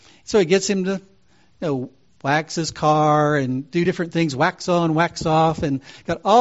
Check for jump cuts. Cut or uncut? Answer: uncut